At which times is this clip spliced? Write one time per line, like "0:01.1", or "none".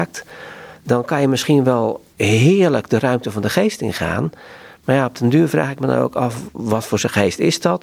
0:02.1